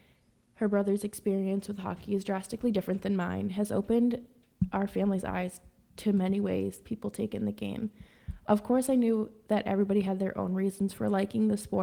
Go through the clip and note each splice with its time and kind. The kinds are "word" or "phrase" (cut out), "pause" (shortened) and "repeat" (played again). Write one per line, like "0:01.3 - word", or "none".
none